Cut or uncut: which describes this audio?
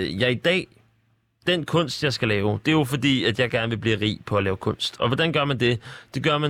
uncut